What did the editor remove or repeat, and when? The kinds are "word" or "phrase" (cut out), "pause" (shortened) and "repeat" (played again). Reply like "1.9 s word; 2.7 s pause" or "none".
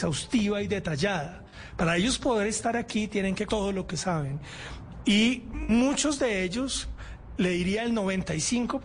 3.5 s word